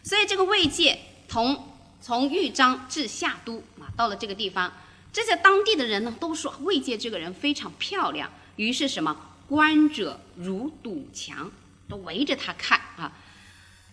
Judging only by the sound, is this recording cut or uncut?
uncut